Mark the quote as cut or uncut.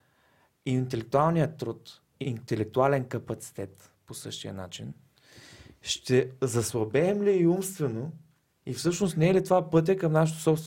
cut